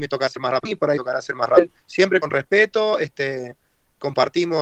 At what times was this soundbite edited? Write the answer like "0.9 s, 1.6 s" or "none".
none

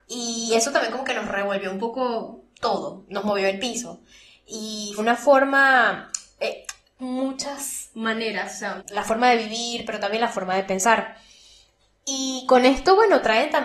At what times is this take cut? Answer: 5.0 s, 7.0 s, 8.8 s

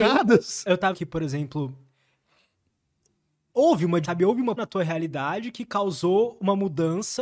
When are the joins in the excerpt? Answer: 0.9 s, 4.0 s, 4.6 s

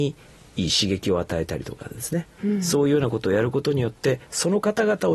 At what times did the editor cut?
none

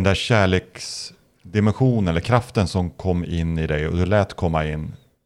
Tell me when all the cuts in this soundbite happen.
none

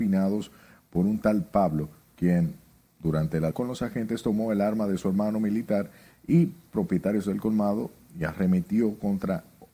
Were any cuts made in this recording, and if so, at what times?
3.5 s

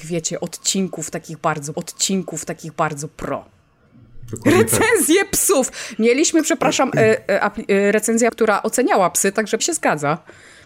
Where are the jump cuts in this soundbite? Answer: 1.7 s, 8.3 s, 9.6 s

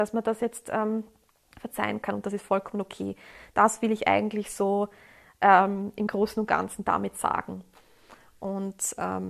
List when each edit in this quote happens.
none

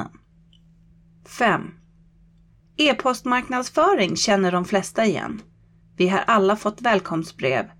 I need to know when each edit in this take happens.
none

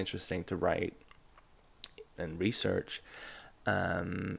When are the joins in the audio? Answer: 2.2 s

